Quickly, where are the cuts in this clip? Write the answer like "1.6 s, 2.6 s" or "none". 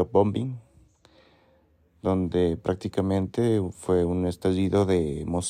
none